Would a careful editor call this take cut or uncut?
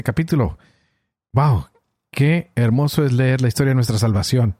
uncut